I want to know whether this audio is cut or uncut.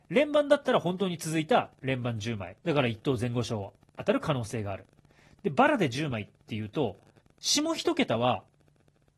cut